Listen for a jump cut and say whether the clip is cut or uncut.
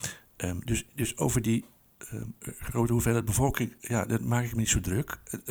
uncut